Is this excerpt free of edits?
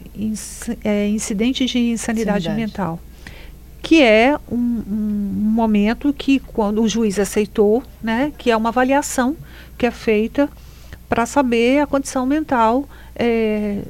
yes; 0 cuts

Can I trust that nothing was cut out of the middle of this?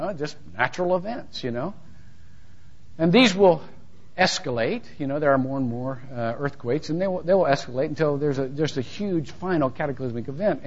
yes; 0 cuts

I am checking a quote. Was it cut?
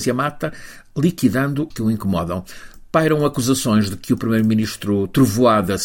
yes; 1 cut; at 1.7 s

